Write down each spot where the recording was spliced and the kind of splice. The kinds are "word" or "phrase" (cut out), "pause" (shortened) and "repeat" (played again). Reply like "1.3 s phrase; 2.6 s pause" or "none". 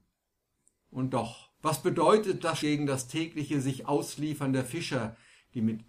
1.5 s pause; 2.6 s word